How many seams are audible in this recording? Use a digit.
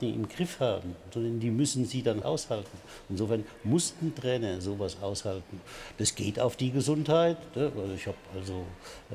1